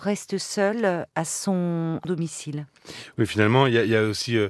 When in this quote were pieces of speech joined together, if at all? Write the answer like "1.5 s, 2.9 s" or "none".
2.0 s